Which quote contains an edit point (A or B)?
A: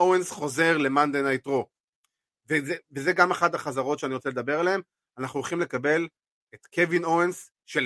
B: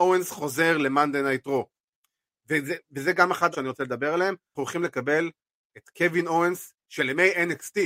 B